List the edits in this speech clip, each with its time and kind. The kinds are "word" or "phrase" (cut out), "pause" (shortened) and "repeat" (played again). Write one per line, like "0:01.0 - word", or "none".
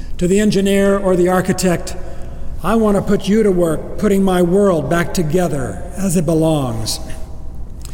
none